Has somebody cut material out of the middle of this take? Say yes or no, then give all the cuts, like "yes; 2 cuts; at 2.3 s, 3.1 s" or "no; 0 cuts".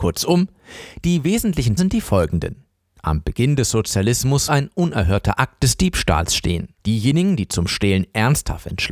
yes; 3 cuts; at 1.8 s, 4.5 s, 6.8 s